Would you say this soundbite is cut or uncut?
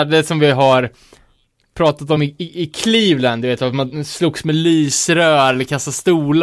uncut